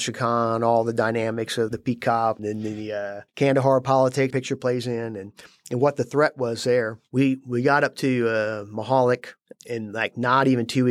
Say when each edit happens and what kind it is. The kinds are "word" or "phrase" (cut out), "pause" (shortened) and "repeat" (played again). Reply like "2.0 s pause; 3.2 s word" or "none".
1.7 s word; 2.4 s word; 3.3 s pause; 4.3 s phrase